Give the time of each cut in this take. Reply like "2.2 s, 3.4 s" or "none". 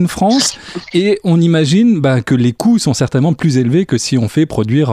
none